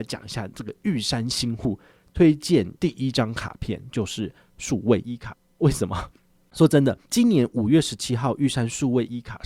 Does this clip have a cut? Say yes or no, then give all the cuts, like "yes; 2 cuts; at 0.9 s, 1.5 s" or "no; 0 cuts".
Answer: yes; 2 cuts; at 2.8 s, 7.0 s